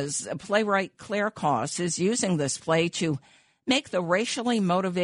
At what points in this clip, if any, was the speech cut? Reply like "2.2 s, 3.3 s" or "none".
none